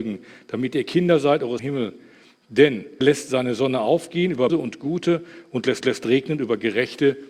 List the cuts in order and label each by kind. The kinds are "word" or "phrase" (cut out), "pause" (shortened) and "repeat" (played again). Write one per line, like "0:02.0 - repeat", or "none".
0:01.6 - phrase
0:03.0 - word
0:04.5 - word
0:05.8 - repeat